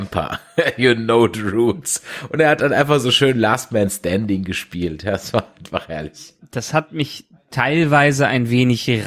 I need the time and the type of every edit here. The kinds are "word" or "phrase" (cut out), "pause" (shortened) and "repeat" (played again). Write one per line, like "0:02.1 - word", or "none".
none